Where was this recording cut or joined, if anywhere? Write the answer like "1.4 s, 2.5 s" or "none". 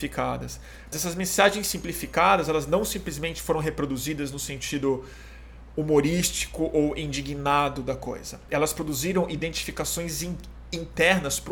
0.9 s